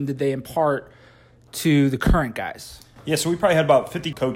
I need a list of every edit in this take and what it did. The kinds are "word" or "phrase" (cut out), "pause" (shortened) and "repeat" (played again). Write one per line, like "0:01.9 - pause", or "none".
none